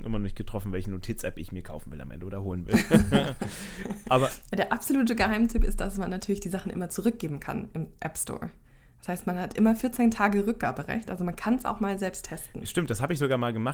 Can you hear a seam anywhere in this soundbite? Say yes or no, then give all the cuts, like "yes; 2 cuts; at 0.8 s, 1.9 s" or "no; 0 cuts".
no; 0 cuts